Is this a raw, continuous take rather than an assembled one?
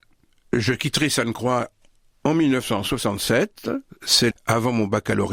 no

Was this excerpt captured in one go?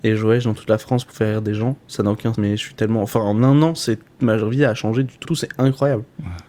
no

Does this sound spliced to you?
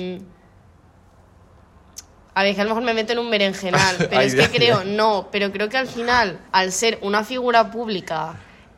yes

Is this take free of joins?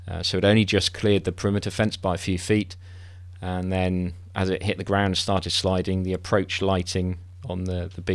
yes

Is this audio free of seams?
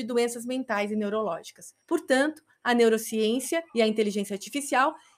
no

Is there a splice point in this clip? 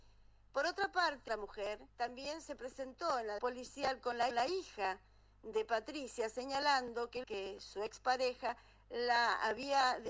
yes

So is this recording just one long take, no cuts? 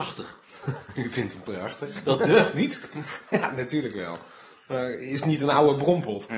yes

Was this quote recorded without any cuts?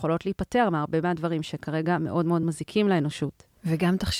yes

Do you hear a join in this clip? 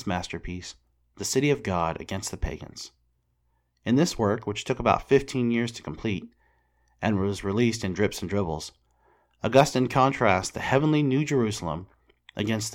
no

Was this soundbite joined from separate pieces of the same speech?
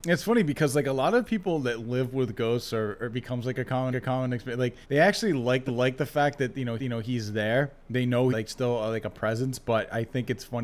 yes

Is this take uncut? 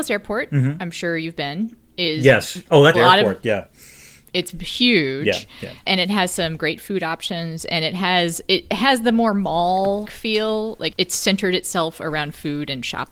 no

